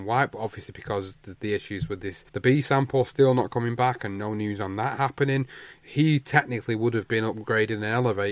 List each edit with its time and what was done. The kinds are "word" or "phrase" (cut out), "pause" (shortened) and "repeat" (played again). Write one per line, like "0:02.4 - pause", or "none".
0:02.3 - pause